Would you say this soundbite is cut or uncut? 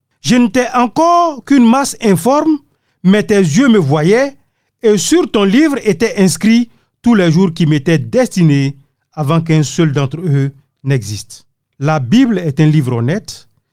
uncut